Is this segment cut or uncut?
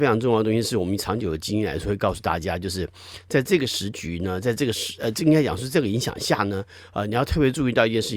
uncut